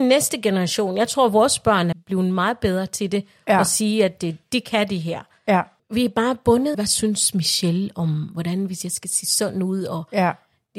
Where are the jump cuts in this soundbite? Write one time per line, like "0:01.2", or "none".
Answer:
0:01.9
0:05.8
0:06.7